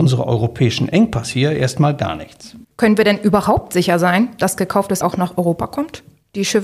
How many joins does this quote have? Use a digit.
2